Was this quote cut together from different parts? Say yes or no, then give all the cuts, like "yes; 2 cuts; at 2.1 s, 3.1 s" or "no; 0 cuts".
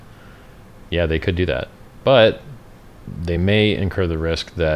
no; 0 cuts